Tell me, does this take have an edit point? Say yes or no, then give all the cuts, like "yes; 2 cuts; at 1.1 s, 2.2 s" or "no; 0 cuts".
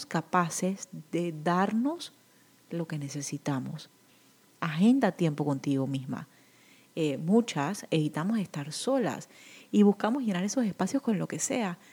no; 0 cuts